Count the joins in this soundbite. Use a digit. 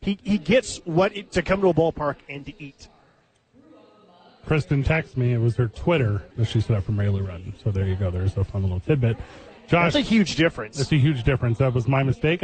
4